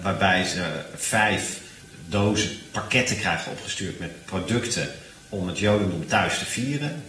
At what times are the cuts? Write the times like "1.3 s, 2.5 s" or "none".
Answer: none